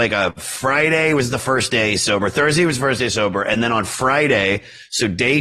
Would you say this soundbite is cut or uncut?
uncut